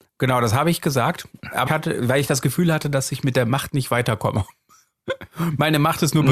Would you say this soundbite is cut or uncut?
cut